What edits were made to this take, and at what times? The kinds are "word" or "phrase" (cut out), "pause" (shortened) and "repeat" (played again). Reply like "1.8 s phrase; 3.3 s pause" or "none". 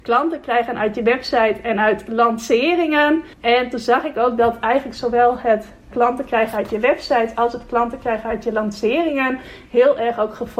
3.3 s pause; 5.9 s word